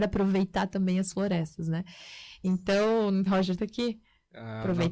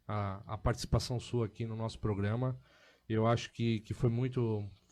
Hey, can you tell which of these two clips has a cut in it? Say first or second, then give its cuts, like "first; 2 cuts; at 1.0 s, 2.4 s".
first; 2 cuts; at 3.3 s, 3.6 s